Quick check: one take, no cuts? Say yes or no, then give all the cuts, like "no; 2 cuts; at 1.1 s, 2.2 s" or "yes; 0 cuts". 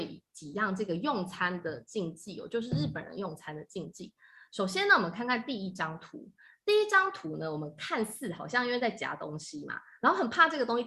yes; 0 cuts